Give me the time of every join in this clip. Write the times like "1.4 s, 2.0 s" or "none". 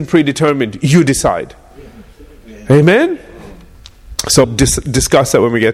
4.4 s